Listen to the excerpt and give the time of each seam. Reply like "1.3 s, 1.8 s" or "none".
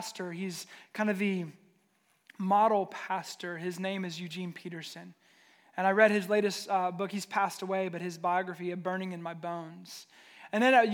none